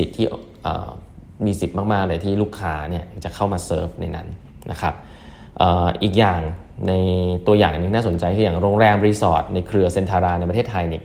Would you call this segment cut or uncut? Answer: uncut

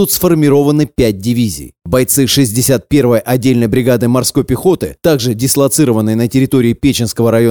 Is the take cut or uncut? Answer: uncut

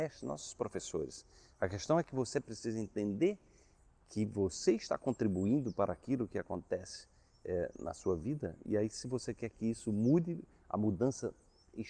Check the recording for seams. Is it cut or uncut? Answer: uncut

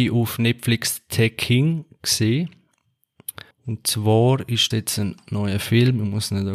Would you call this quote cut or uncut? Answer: cut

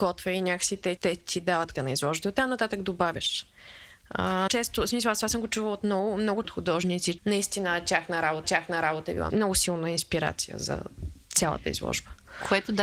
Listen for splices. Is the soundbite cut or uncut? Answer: cut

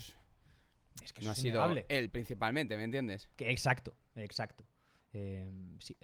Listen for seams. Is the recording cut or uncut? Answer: uncut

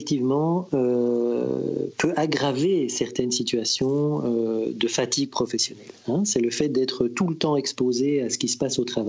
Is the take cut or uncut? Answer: uncut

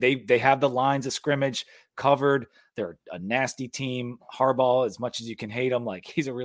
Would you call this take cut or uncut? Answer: uncut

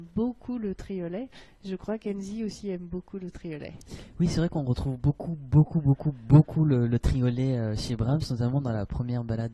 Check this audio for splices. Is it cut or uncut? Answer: uncut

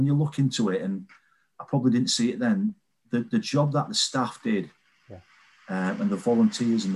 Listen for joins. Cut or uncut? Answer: uncut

